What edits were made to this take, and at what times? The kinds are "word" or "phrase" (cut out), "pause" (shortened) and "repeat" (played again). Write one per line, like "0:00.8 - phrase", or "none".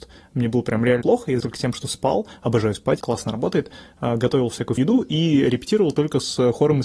0:01.0 - word
0:01.4 - word
0:03.0 - word
0:04.8 - word